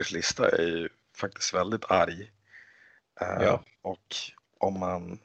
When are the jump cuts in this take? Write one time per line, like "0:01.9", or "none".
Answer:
none

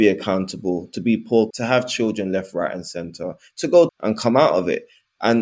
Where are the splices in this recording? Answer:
0:01.5
0:03.9

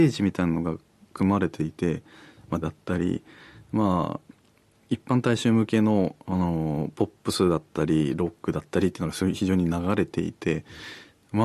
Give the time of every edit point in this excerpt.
0:02.6

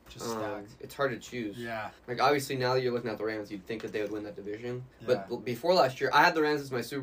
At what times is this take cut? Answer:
0:02.0
0:04.9

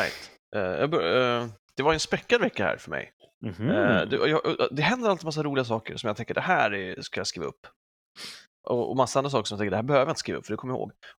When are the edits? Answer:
none

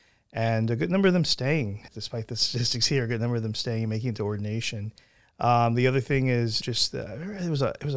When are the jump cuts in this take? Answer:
0:01.9
0:06.6

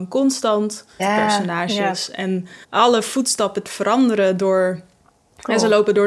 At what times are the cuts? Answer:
0:01.0
0:02.6
0:03.6

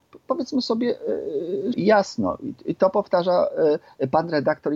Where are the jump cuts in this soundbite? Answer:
0:01.7

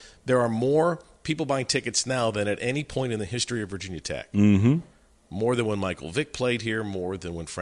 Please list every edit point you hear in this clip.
none

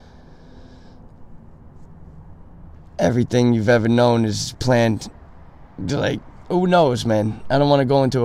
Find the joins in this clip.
none

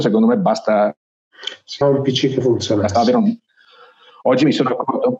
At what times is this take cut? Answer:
0:01.8

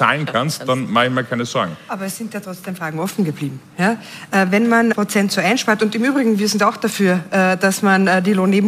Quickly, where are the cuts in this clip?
0:04.9

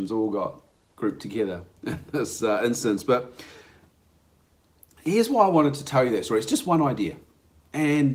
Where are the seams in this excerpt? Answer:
none

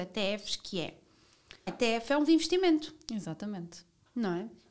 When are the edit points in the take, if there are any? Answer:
0:01.7
0:02.3

